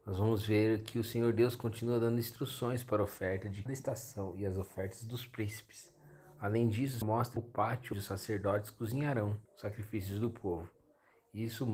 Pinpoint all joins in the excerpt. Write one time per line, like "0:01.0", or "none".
0:03.7
0:07.0
0:07.4
0:07.9
0:09.4